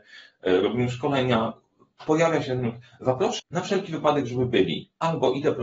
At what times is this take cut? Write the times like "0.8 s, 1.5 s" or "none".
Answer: 3.4 s